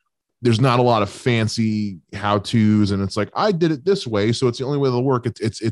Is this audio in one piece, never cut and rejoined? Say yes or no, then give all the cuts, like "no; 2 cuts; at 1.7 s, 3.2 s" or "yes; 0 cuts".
yes; 0 cuts